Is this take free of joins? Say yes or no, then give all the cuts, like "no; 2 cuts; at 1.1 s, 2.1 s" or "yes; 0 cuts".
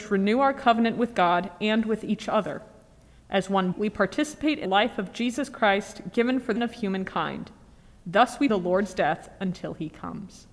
no; 4 cuts; at 3.7 s, 4.6 s, 6.6 s, 8.5 s